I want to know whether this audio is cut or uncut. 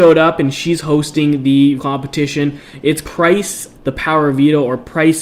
cut